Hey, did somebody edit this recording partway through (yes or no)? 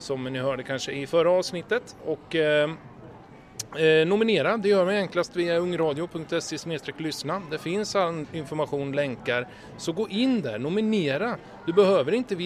no